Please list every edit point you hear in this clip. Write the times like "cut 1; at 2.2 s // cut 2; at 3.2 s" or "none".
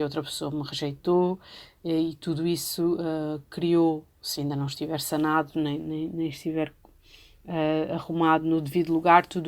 none